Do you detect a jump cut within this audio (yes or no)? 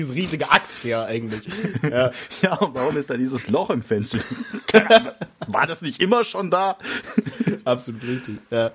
no